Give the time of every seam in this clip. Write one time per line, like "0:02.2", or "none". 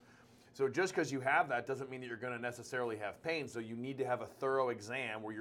none

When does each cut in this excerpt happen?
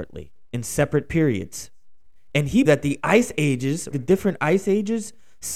0:02.6
0:03.9

